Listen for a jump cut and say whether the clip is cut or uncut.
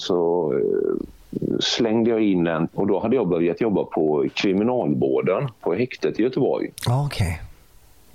cut